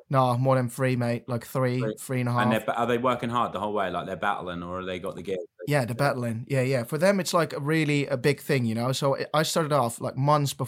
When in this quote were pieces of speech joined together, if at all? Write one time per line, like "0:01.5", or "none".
none